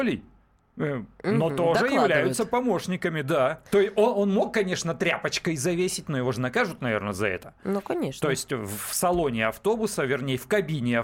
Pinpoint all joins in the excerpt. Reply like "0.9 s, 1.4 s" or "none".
3.7 s